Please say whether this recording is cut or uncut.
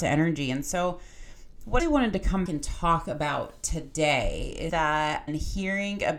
cut